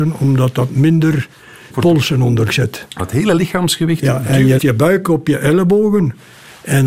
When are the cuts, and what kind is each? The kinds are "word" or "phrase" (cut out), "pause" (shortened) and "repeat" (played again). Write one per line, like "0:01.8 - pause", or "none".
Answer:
0:01.7 - word
0:02.5 - word
0:03.0 - word
0:04.6 - word

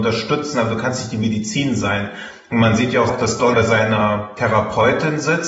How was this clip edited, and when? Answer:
0:03.1 - word
0:03.5 - word

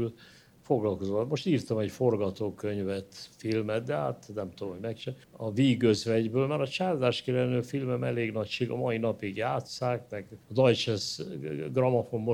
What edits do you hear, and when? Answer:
0:05.2 - pause
0:10.4 - pause

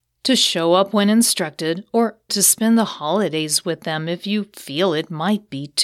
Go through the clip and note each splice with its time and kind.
0:02.3 - word

